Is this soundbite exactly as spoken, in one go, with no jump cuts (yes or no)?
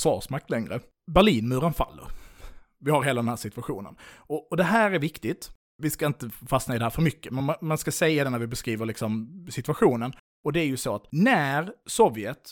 yes